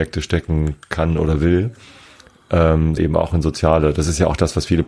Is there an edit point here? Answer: yes; 1 cut; at 3.0 s

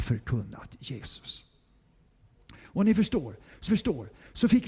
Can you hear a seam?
yes; 1 cut; at 3.7 s

